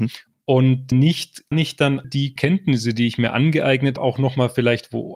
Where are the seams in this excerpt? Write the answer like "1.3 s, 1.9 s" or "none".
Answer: 0.9 s, 1.5 s, 2.0 s, 2.4 s, 4.0 s

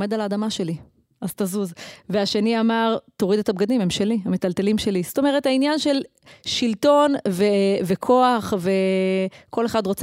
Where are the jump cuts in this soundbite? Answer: none

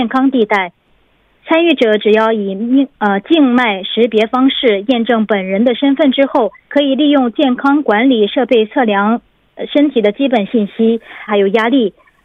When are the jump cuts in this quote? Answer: 6.6 s, 11.3 s

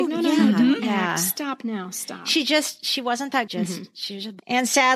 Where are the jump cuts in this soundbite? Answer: 3.5 s

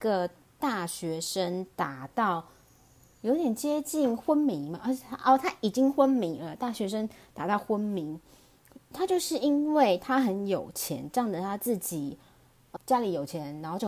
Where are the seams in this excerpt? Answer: 12.8 s

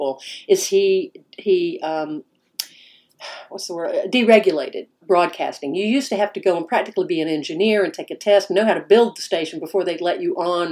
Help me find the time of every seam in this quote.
5.0 s

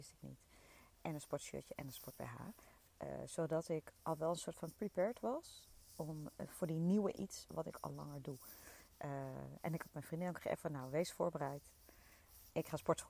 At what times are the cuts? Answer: 7.1 s, 10.6 s

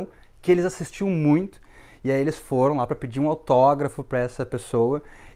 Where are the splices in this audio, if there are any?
none

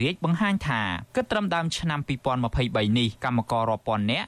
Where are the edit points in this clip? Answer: 1.1 s, 3.2 s

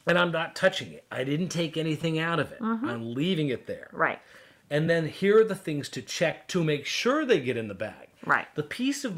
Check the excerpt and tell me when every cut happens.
none

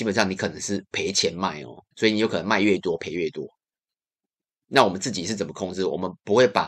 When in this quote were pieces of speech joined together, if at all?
1.9 s

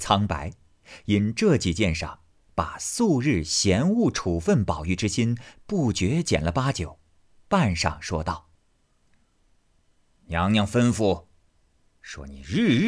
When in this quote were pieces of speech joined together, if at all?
none

